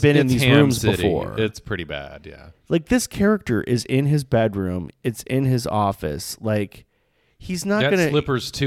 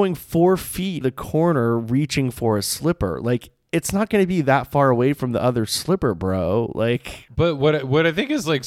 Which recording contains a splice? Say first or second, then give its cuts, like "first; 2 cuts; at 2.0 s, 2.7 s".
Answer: second; 1 cut; at 1.0 s